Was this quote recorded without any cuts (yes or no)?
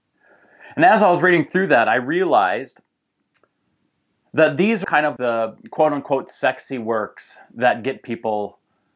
no